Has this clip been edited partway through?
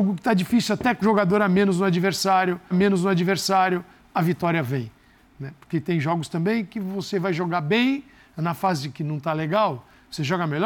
yes; 2 cuts; at 1.0 s, 2.7 s

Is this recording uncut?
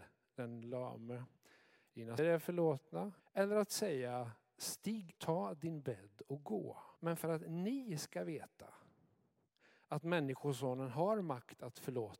no; 4 cuts; at 2.2 s, 3.2 s, 5.2 s, 7.0 s

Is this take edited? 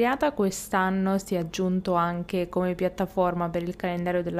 no; 0 cuts

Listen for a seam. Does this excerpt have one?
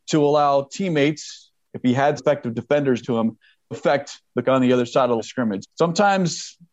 yes; 6 cuts; at 2.2 s, 3.0 s, 3.7 s, 4.4 s, 5.2 s, 5.6 s

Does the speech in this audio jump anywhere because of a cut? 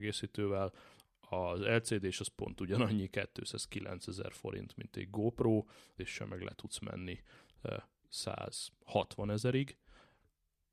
yes; 1 cut; at 6.0 s

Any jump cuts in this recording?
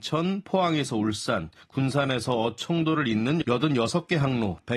yes; 1 cut; at 3.4 s

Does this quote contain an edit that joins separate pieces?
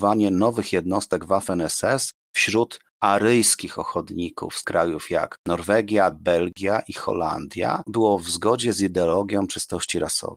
yes; 3 cuts; at 4.6 s, 6.1 s, 7.9 s

